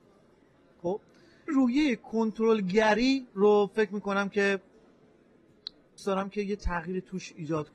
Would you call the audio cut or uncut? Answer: cut